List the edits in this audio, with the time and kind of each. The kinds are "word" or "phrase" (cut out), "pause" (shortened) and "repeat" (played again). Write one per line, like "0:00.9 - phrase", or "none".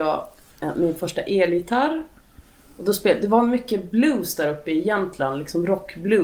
none